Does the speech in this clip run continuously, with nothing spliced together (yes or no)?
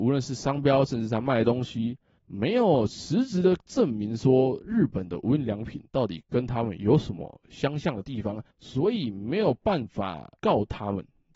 no